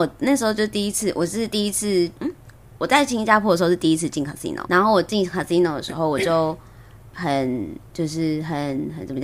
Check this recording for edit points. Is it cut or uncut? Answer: cut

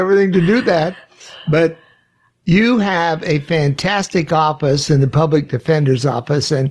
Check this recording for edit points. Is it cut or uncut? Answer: uncut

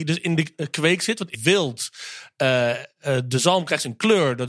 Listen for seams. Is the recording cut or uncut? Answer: cut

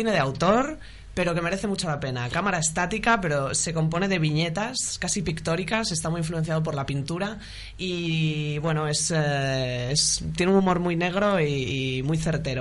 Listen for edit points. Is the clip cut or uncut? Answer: uncut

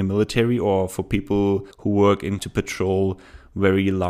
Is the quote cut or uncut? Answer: cut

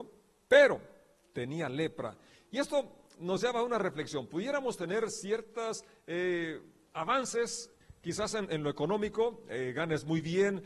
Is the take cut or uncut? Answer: uncut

